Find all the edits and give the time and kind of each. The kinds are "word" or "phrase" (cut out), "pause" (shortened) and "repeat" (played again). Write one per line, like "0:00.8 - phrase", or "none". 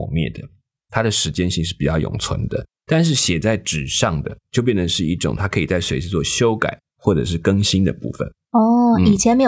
0:02.7 - pause

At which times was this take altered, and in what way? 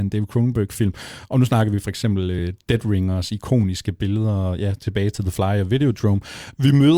none

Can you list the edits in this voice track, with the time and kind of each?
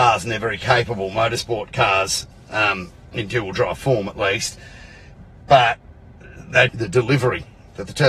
0:06.7 - phrase

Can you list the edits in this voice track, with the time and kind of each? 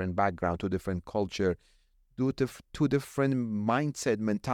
none

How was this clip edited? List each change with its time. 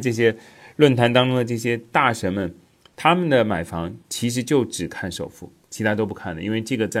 none

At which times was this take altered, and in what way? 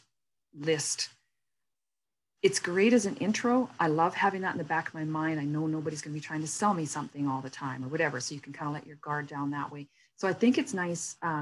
none

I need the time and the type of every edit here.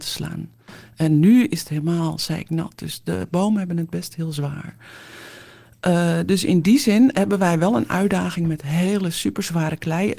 none

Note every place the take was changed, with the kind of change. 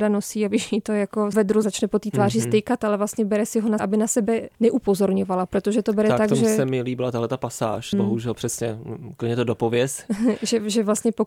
0:01.3 - phrase
0:01.6 - word
0:03.8 - word
0:04.5 - pause
0:07.9 - word

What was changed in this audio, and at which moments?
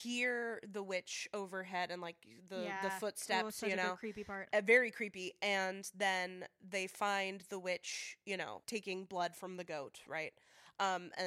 0:08.6 - word

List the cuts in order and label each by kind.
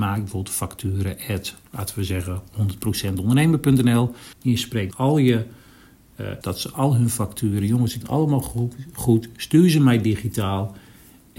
0:04.3 - pause
0:04.9 - word
0:06.4 - phrase
0:08.0 - word

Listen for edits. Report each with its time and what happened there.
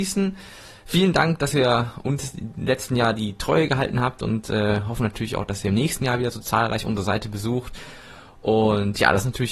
none

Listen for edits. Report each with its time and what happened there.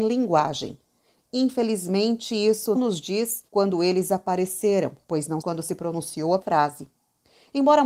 0:02.7 - word
0:03.5 - pause
0:05.0 - pause
0:05.4 - word
0:06.4 - word

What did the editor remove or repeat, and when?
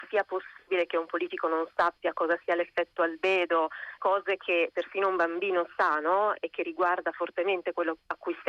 0:04.0 - word

